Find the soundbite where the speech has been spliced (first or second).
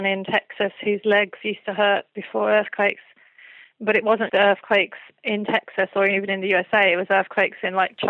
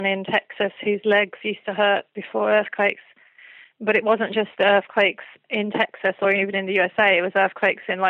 first